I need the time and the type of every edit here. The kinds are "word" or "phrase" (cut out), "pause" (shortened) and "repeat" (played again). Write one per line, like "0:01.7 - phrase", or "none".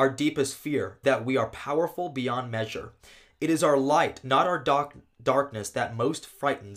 0:01.0 - word